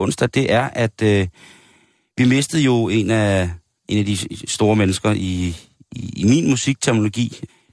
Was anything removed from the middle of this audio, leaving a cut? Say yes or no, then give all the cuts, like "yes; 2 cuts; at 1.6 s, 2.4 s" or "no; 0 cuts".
no; 0 cuts